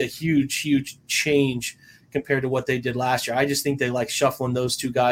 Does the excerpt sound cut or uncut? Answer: uncut